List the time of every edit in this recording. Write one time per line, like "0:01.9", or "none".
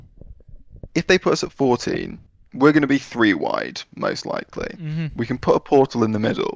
0:02.3

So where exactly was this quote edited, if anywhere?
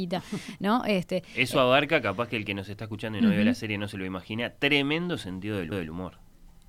0:05.7

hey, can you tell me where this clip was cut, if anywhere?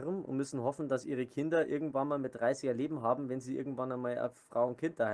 none

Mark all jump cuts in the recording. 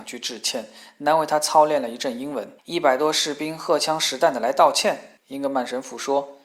0:02.6
0:05.2

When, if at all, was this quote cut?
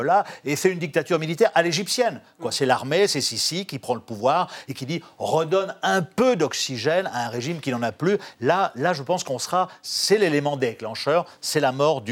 none

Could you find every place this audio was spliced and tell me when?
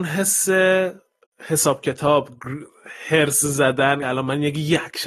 0:04.0

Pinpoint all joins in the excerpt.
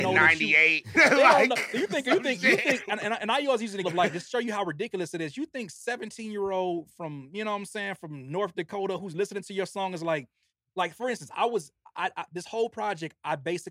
0:00.9
0:03.8
0:10.5

